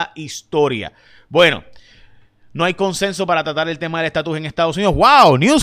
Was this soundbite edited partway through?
no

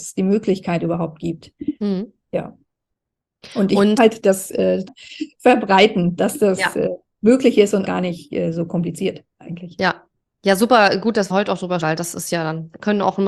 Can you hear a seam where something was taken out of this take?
yes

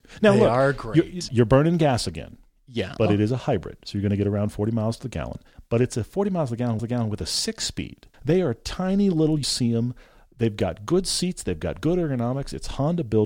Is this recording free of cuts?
no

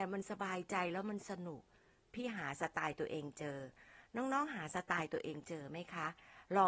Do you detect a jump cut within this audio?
no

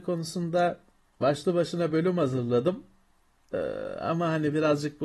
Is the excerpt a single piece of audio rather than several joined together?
yes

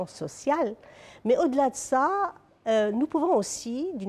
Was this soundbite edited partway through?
no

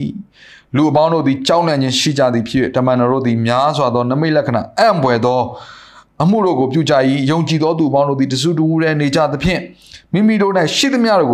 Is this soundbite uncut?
yes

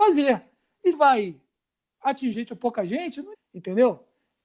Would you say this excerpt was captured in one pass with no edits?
no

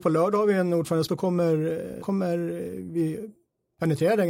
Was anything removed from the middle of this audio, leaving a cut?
yes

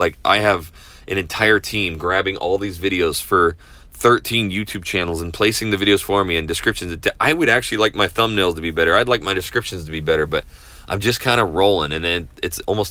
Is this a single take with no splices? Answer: yes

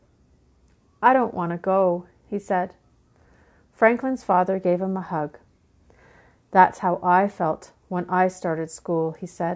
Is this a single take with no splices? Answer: yes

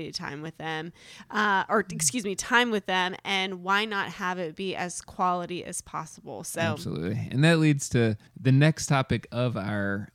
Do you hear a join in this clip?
yes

